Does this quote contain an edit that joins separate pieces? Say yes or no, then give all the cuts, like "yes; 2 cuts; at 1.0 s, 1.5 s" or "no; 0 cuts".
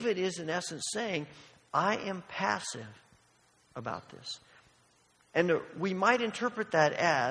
no; 0 cuts